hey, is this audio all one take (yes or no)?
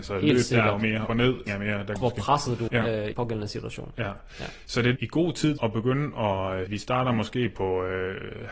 no